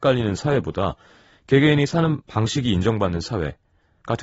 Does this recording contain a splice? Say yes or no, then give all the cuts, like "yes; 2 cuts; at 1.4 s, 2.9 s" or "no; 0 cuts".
no; 0 cuts